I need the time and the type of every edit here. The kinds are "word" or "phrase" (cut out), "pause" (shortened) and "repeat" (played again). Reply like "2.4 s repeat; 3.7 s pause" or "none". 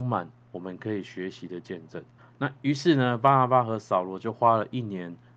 2.2 s pause